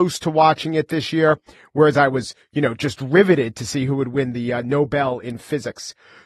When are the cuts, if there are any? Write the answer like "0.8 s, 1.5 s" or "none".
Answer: none